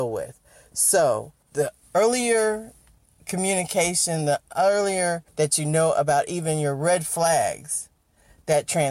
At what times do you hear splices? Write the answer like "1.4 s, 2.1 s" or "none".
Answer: 5.3 s